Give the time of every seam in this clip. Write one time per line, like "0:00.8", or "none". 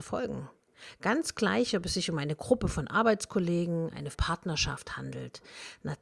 0:04.1